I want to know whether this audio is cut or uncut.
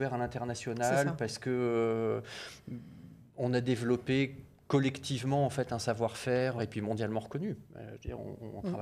cut